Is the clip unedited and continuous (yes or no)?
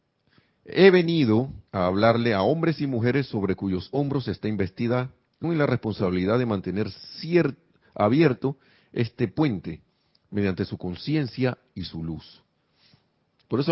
no